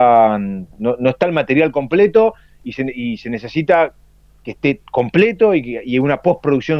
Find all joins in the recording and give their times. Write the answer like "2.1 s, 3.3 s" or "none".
none